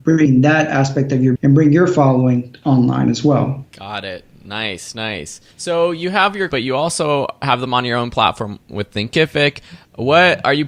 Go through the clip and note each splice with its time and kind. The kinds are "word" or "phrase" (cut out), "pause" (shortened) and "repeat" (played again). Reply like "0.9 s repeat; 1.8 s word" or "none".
1.3 s phrase; 3.7 s pause; 5.5 s pause; 6.5 s phrase